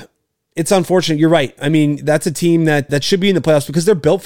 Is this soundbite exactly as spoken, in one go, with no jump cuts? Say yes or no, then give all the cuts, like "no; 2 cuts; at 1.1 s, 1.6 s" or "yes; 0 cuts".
no; 1 cut; at 2.9 s